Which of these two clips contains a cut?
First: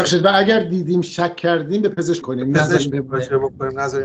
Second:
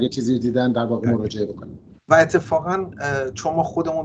first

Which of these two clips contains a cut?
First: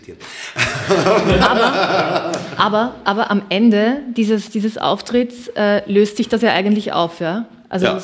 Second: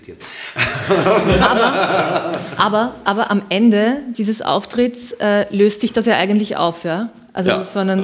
second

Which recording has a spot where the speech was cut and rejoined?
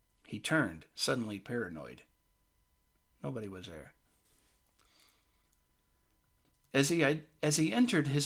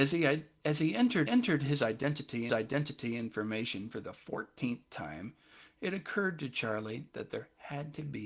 second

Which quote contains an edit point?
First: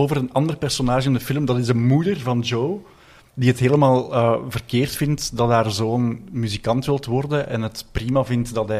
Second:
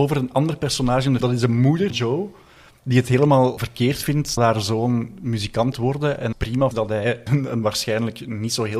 second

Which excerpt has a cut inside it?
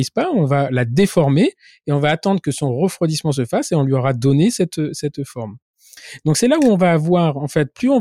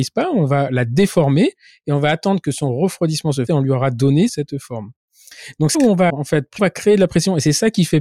second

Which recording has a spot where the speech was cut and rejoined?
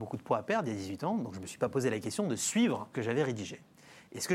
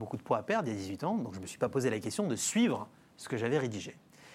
first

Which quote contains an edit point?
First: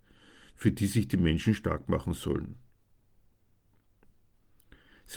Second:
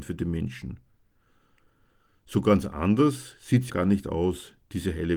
second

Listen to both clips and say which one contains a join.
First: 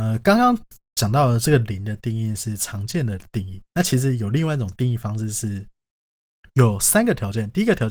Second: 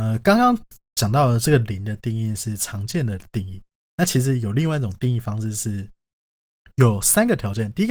first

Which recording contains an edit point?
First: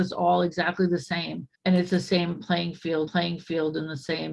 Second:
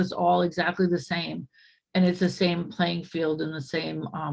first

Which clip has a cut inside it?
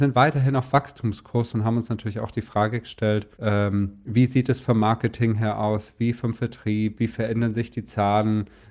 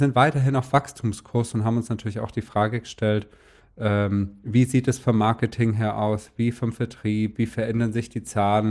first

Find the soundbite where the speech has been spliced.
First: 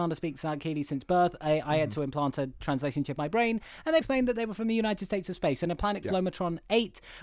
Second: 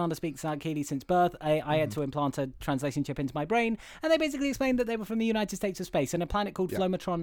first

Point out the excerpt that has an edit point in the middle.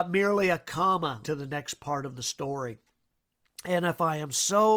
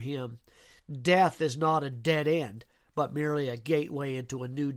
first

